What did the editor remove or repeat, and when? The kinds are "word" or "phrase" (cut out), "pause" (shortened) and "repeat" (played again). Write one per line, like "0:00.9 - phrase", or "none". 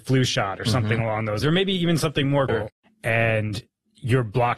0:01.4 - word
0:02.5 - word